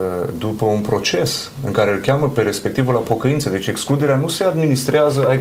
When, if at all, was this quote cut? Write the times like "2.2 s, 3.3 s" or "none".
none